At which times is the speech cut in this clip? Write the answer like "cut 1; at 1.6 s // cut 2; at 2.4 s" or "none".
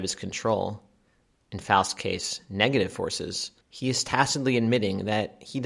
cut 1; at 3.6 s